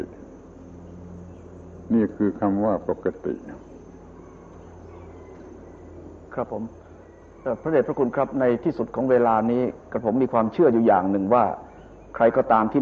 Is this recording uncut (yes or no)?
no